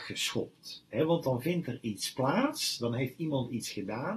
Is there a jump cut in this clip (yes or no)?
no